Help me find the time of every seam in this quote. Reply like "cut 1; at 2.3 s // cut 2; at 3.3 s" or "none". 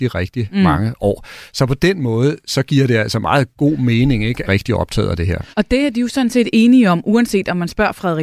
cut 1; at 4.5 s // cut 2; at 5.5 s